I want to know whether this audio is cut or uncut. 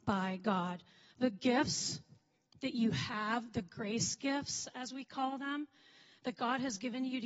uncut